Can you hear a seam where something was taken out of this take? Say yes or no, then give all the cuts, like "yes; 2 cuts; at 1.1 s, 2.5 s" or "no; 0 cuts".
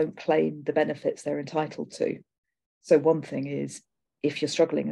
no; 0 cuts